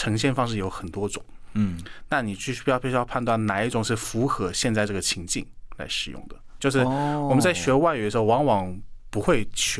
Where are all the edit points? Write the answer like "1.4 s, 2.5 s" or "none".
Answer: 6.6 s